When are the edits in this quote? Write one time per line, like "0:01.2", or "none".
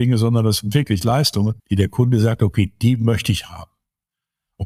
0:01.6